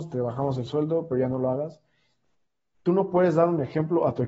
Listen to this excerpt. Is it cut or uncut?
uncut